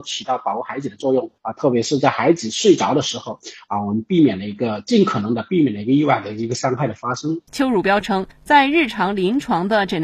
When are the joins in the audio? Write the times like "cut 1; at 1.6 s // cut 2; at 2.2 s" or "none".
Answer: cut 1; at 1.4 s // cut 2; at 7.5 s